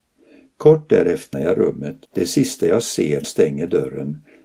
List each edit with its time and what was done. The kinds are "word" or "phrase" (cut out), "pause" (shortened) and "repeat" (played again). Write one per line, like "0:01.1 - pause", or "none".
0:01.3 - word
0:02.1 - pause
0:03.2 - word